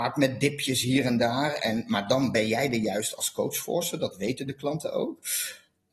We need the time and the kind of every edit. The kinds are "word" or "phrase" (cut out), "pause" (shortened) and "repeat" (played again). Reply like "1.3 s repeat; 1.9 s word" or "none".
none